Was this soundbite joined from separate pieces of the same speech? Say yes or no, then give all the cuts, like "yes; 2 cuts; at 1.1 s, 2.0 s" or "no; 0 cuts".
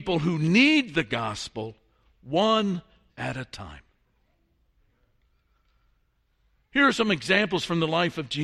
yes; 1 cut; at 3.1 s